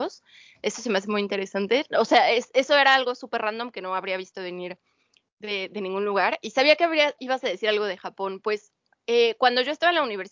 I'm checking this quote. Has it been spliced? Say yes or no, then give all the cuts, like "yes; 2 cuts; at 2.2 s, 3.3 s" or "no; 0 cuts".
no; 0 cuts